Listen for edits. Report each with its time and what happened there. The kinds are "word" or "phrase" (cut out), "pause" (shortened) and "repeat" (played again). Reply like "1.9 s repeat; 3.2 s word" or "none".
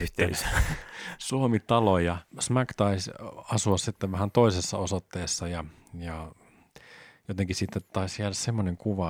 2.3 s pause